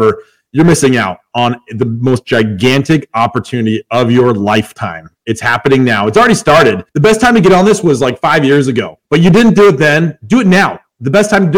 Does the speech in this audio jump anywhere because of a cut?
yes; 2 cuts; at 6.9 s, 9.1 s

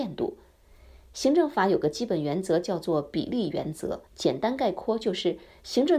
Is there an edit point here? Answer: yes; 1 cut; at 4.1 s

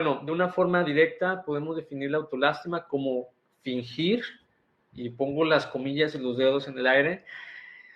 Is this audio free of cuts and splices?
yes; 0 cuts

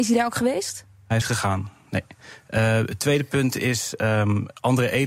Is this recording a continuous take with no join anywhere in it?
no; 1 cut; at 1.2 s

